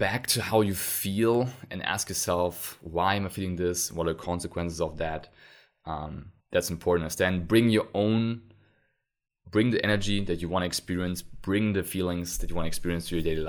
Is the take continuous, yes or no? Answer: no